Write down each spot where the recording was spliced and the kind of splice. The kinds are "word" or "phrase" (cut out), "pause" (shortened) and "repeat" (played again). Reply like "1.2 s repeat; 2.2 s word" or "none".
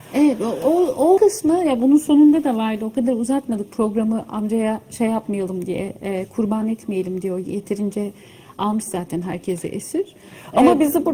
1.2 s word